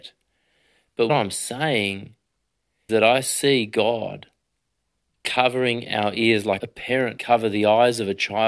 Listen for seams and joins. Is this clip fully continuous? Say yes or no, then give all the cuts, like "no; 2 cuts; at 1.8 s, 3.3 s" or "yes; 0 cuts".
no; 4 cuts; at 1.1 s, 2.9 s, 6.6 s, 7.2 s